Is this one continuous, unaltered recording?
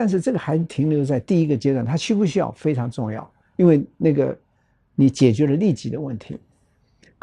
yes; 0 cuts

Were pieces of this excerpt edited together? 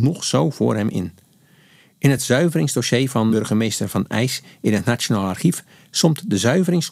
no; 0 cuts

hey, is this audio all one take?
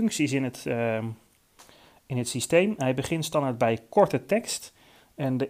yes; 0 cuts

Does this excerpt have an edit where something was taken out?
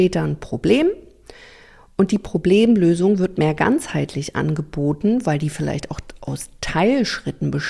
yes; 1 cut; at 3.3 s

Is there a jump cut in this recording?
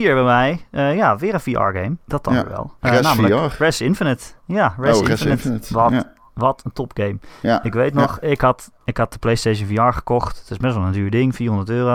yes; 4 cuts; at 2.0 s, 2.8 s, 4.4 s, 8.8 s

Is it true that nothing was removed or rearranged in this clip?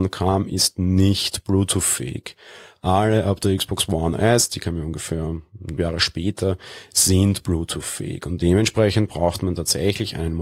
no; 1 cut; at 5.8 s

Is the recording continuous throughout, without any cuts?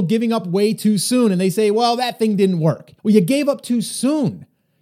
no; 1 cut; at 3.0 s

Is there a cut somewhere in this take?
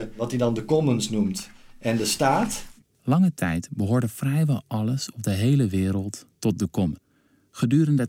no; 0 cuts

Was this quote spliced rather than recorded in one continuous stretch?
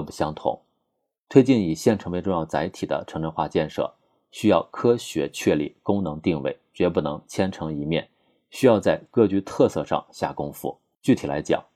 no; 0 cuts

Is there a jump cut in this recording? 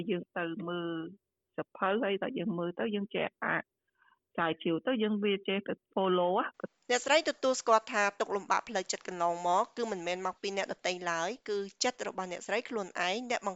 no; 0 cuts

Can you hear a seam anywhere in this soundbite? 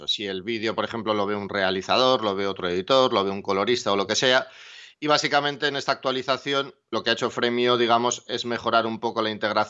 no; 0 cuts

